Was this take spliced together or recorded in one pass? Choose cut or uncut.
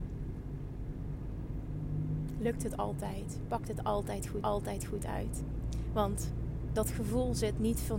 cut